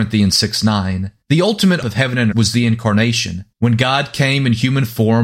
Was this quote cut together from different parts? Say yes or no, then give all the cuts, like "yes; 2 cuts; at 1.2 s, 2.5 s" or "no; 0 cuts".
yes; 4 cuts; at 1.2 s, 1.8 s, 2.3 s, 3.5 s